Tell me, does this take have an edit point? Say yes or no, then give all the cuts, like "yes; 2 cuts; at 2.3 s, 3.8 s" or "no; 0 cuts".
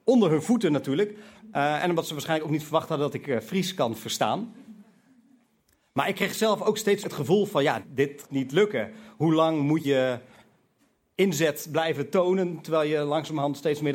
yes; 4 cuts; at 7.0 s, 7.8 s, 8.2 s, 9.8 s